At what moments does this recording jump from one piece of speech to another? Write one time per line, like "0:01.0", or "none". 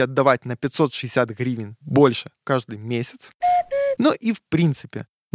none